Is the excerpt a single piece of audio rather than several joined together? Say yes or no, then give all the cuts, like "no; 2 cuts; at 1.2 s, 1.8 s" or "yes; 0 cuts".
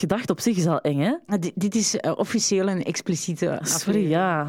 yes; 0 cuts